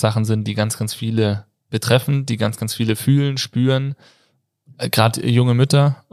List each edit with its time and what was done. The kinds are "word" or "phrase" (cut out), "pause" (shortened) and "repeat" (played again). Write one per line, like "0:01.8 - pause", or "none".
none